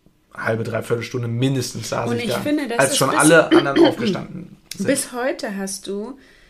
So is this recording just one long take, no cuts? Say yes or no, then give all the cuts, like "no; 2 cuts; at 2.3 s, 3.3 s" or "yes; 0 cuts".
yes; 0 cuts